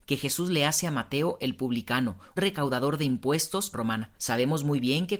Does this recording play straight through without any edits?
no; 3 cuts; at 2.4 s, 3.7 s, 4.2 s

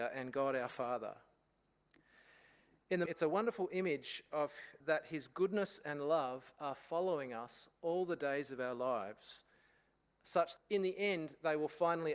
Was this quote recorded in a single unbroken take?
no; 3 cuts; at 3.1 s, 4.8 s, 10.6 s

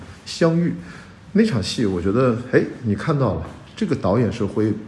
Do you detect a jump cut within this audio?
no; 0 cuts

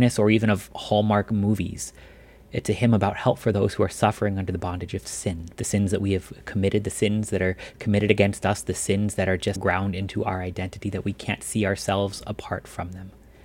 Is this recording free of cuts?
no; 2 cuts; at 5.5 s, 9.6 s

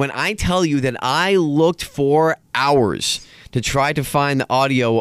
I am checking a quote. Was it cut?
no; 0 cuts

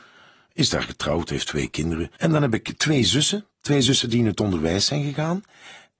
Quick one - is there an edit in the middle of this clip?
no; 0 cuts

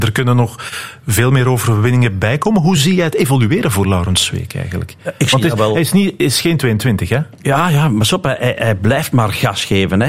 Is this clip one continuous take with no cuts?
yes; 0 cuts

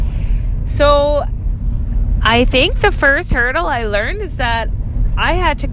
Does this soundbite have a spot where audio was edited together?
no; 0 cuts

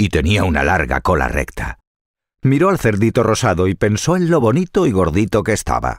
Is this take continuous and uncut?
yes; 0 cuts

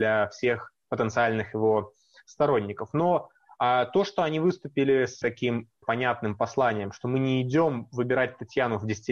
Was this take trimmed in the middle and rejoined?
yes; 2 cuts; at 5.2 s, 5.8 s

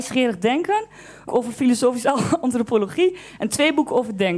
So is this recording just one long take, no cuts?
no; 1 cut; at 1.3 s

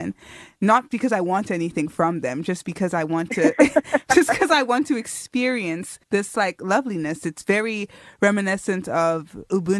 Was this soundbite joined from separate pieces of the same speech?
yes; 1 cut; at 6.0 s

